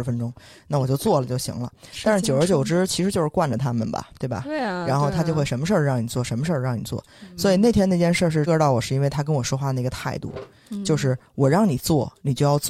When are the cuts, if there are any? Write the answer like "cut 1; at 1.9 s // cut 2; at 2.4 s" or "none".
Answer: cut 1; at 8.5 s